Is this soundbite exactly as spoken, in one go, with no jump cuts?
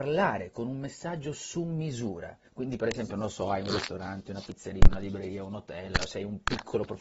no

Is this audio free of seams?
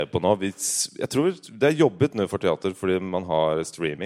yes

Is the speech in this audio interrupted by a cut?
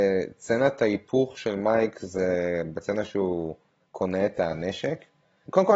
no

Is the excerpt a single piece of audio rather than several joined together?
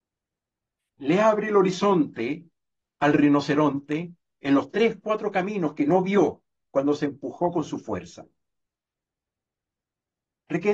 yes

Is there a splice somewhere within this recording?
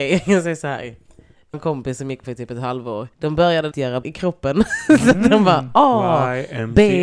yes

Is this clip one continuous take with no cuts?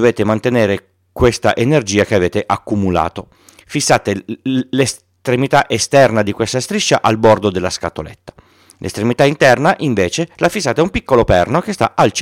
yes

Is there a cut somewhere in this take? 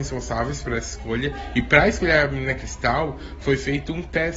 no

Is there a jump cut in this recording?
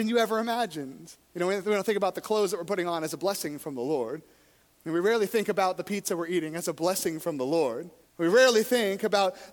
yes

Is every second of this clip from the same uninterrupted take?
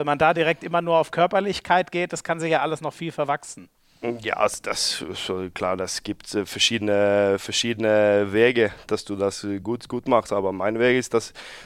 yes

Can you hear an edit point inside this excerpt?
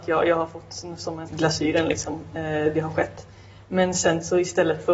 yes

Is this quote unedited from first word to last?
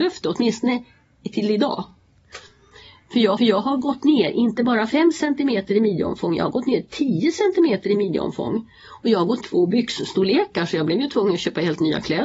no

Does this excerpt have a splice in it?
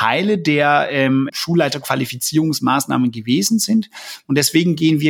yes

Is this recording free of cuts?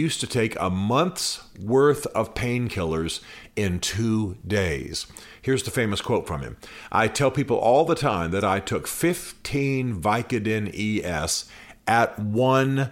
yes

